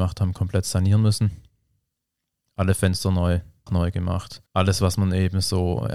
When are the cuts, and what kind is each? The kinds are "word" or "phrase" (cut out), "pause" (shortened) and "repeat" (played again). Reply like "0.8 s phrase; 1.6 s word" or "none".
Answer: 3.7 s word; 4.5 s pause